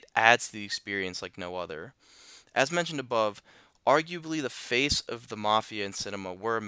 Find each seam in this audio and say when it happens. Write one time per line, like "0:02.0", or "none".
none